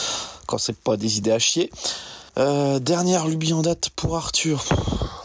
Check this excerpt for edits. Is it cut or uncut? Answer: cut